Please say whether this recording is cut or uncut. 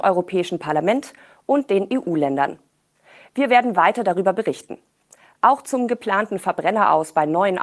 uncut